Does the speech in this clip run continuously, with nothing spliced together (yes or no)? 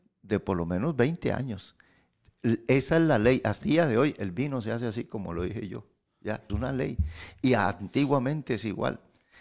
no